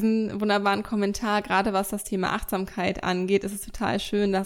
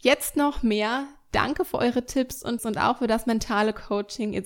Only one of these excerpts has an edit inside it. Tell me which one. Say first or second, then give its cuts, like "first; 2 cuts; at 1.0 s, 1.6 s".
second; 1 cut; at 2.6 s